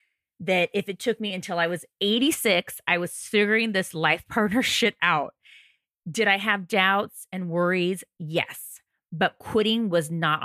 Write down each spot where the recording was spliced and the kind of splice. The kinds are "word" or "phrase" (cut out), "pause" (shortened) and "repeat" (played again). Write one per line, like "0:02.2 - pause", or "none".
none